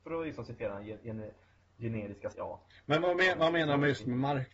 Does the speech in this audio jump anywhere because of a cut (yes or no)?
yes